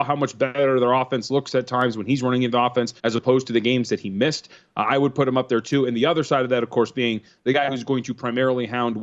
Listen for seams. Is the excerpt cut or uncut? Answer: cut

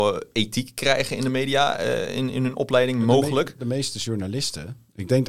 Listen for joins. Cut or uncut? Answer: uncut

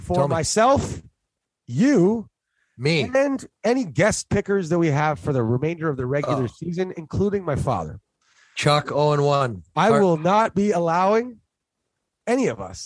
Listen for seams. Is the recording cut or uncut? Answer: uncut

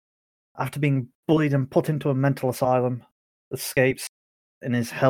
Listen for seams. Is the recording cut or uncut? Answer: uncut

